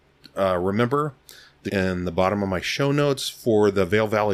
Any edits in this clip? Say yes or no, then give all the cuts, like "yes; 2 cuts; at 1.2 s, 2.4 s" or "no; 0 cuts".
yes; 1 cut; at 1.7 s